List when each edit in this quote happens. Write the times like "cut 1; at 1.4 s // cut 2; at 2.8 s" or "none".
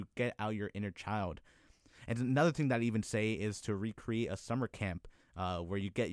none